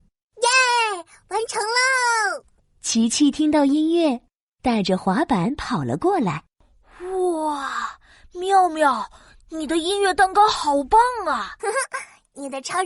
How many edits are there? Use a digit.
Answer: 2